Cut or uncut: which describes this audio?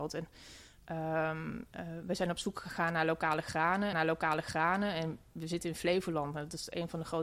cut